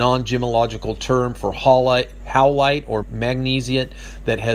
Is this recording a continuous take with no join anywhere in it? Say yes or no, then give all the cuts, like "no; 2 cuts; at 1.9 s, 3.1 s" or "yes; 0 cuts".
no; 1 cut; at 3.0 s